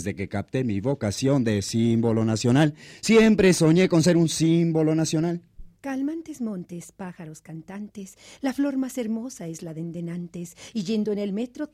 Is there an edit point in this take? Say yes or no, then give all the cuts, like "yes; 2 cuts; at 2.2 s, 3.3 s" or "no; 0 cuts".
yes; 1 cut; at 5.8 s